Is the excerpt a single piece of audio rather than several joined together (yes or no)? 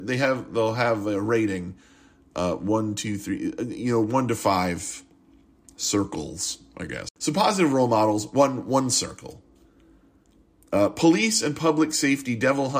yes